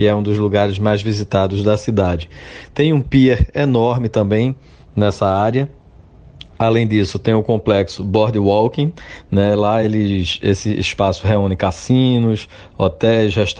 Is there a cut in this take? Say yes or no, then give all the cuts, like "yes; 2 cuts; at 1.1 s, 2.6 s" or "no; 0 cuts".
no; 0 cuts